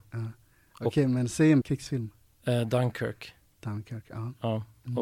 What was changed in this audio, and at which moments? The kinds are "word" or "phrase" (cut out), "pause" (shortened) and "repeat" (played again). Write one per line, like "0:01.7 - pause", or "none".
0:01.6 - word